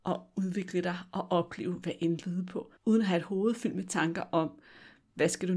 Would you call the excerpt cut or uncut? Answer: cut